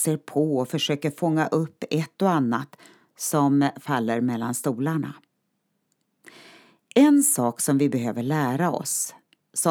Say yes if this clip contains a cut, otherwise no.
no